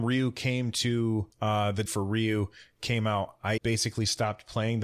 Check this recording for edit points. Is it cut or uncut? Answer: cut